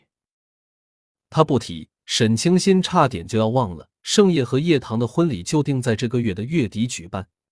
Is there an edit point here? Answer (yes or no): yes